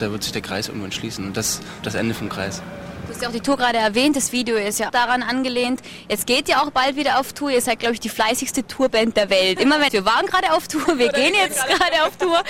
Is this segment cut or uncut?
cut